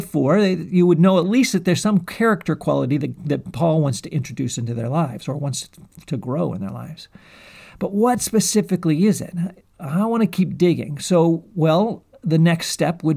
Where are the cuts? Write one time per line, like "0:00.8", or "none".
none